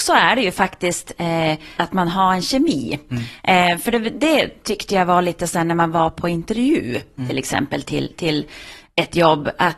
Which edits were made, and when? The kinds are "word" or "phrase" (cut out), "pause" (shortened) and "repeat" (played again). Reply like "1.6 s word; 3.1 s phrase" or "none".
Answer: 1.8 s word